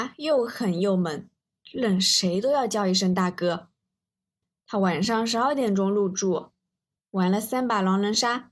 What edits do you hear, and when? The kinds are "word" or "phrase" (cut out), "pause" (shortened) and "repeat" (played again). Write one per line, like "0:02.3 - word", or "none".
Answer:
none